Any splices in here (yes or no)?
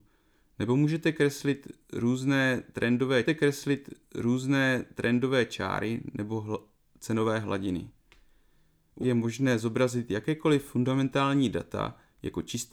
yes